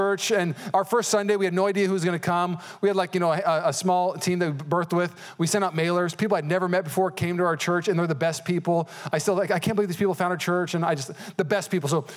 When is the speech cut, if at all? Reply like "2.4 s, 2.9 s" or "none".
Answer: none